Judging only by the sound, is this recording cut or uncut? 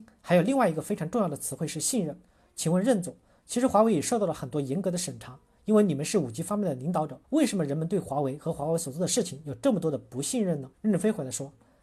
cut